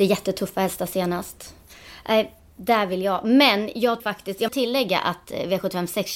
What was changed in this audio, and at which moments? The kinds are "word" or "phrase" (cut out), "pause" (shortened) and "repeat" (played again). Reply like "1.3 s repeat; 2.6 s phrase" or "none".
4.0 s word; 4.5 s word